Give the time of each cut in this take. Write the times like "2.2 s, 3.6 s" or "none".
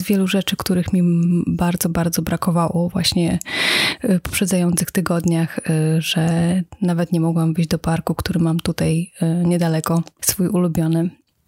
none